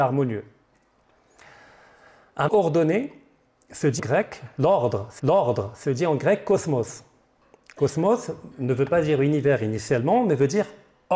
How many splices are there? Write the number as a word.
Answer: three